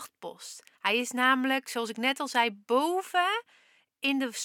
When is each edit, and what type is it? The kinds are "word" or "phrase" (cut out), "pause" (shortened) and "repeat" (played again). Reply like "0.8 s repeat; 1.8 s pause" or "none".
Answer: none